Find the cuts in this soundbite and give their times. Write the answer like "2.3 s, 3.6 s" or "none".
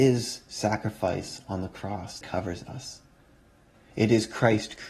2.2 s

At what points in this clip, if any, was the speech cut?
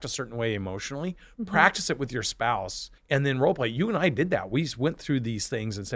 3.0 s

